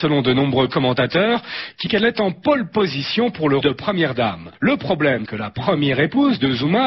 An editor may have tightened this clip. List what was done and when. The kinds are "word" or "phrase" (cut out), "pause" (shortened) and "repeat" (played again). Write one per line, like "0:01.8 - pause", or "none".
0:01.9 - word
0:03.6 - word
0:05.3 - word